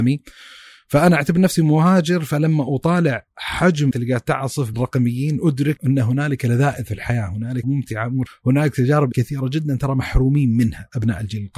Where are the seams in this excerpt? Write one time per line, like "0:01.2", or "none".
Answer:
0:03.9
0:04.7
0:05.8
0:07.6
0:08.3
0:09.1